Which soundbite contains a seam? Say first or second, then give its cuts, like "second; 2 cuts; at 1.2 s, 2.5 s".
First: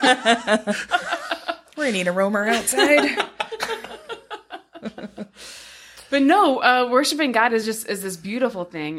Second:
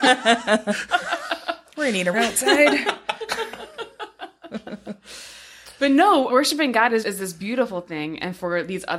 second; 3 cuts; at 2.1 s, 6.3 s, 7.0 s